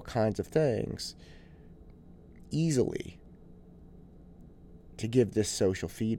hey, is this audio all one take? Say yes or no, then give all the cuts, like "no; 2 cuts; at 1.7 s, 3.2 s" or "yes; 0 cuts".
yes; 0 cuts